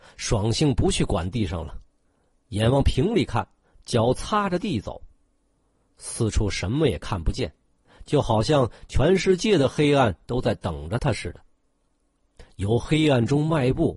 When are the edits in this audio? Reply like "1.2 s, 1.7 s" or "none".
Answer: none